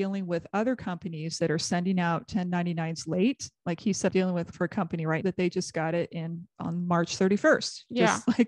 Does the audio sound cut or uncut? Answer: cut